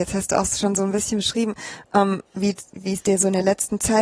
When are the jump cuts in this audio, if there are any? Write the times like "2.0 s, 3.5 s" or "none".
2.3 s